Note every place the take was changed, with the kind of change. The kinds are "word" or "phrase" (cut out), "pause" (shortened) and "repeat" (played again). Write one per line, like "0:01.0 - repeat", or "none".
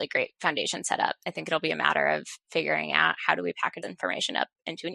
0:03.8 - word